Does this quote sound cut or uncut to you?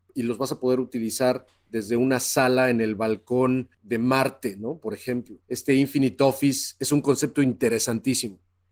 cut